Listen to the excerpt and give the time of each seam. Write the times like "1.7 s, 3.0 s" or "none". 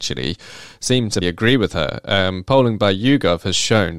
1.2 s